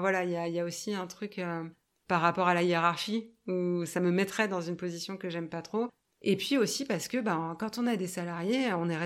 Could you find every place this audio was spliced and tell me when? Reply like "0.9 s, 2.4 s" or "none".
none